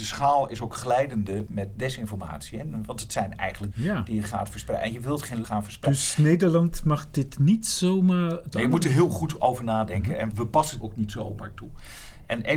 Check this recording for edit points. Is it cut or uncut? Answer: cut